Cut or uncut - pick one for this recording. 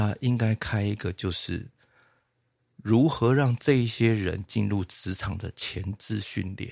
uncut